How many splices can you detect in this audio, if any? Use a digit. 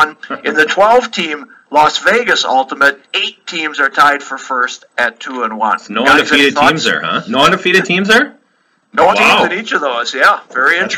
2